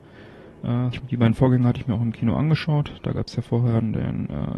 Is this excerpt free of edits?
no; 1 cut; at 0.9 s

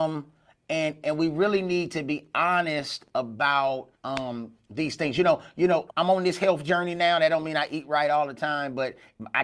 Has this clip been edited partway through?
yes; 3 cuts; at 1.0 s, 3.9 s, 5.9 s

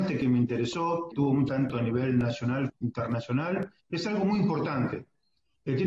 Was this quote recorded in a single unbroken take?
no; 4 cuts; at 1.1 s, 1.5 s, 2.7 s, 3.8 s

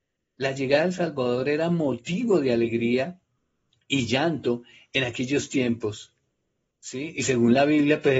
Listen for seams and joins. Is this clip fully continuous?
yes; 0 cuts

